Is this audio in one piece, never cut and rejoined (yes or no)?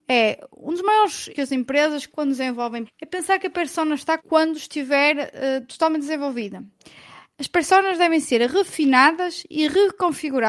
no